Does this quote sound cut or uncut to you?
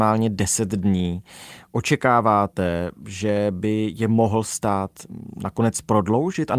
uncut